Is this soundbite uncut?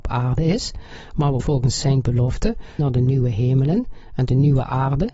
no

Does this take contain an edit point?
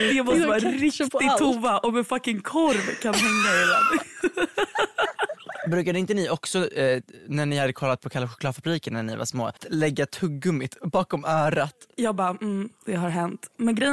yes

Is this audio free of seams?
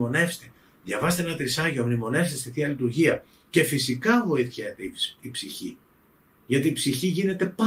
yes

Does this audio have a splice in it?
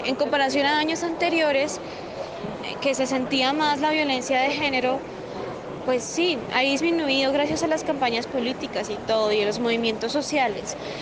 yes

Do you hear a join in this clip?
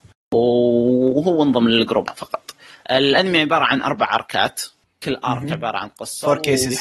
no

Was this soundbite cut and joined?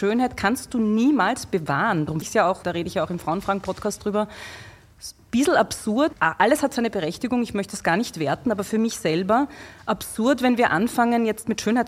yes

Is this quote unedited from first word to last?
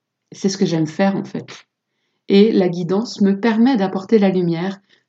yes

